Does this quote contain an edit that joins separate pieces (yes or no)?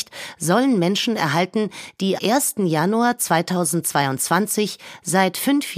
yes